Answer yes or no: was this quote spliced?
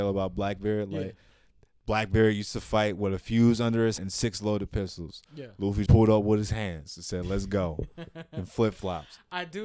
yes